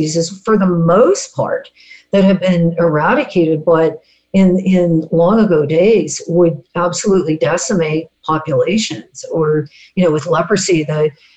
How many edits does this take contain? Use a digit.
0